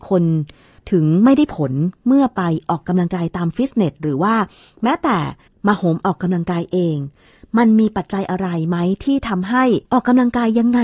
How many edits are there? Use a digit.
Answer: 1